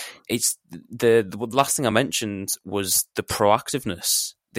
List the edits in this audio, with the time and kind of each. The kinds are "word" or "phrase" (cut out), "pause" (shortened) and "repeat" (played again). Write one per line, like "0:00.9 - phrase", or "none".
none